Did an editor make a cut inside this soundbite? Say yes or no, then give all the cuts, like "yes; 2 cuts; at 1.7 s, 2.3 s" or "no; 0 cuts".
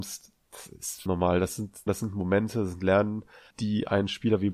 yes; 3 cuts; at 1.1 s, 1.9 s, 3.5 s